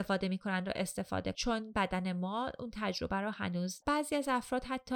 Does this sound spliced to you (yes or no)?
yes